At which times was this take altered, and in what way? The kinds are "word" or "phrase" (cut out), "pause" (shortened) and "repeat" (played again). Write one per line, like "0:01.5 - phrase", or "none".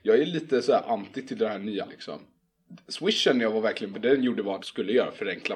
0:01.9 - word
0:03.9 - word
0:04.6 - word